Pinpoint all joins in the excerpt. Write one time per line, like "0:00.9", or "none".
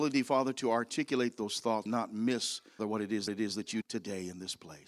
0:01.9
0:02.8
0:03.3
0:03.8